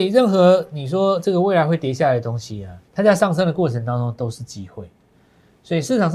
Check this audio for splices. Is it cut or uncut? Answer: cut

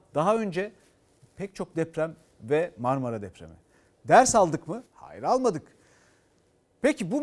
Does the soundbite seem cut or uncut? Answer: cut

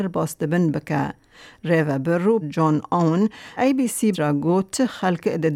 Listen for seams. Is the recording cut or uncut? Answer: cut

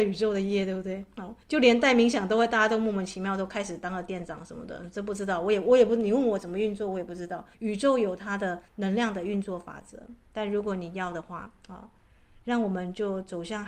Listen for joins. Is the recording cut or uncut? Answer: cut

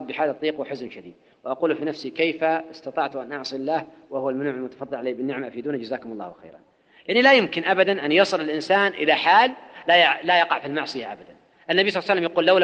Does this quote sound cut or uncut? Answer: uncut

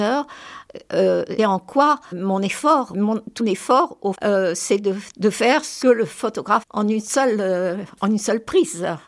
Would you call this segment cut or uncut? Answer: cut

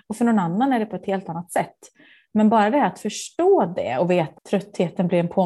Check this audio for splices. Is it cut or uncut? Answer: cut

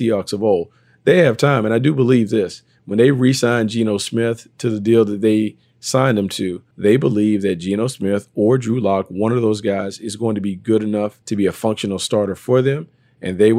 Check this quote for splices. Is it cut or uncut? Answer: cut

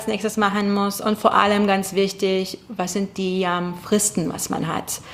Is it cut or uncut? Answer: uncut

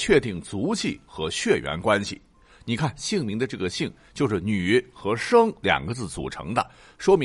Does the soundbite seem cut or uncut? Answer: uncut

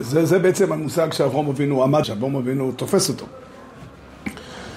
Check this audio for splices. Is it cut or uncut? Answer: cut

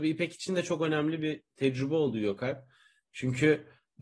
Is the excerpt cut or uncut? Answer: uncut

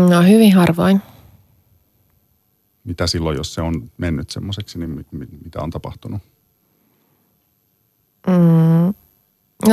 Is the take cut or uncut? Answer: uncut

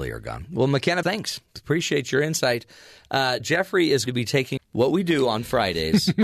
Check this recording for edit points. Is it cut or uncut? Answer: cut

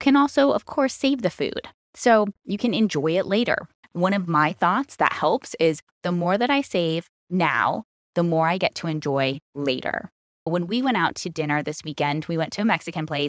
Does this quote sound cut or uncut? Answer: uncut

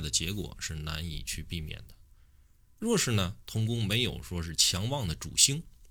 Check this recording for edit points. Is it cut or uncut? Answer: uncut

